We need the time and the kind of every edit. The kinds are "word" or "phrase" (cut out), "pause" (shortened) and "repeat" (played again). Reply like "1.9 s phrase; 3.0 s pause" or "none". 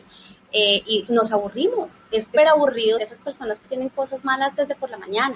1.1 s word; 2.4 s word; 3.0 s word; 3.6 s word

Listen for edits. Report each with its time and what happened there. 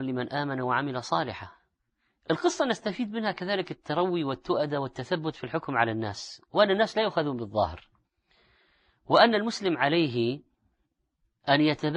none

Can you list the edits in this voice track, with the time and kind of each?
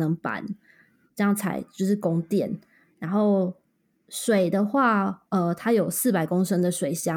none

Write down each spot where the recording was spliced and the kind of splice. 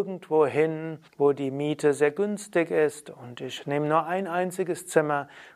1.1 s pause

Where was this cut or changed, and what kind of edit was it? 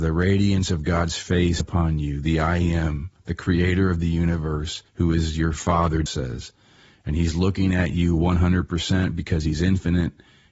1.6 s word; 4.9 s pause; 6.1 s word

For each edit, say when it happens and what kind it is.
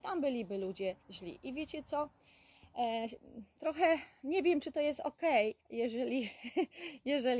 1.0 s pause; 5.6 s pause

